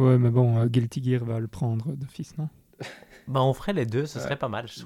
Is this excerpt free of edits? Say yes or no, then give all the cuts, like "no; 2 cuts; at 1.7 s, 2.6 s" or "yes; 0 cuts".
yes; 0 cuts